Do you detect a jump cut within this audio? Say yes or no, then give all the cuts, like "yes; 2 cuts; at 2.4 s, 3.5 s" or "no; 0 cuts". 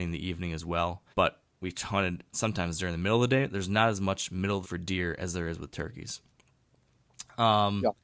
yes; 3 cuts; at 1.1 s, 2.3 s, 4.6 s